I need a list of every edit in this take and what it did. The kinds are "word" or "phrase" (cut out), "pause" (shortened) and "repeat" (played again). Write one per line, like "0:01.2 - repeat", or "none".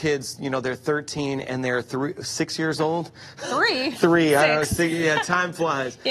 none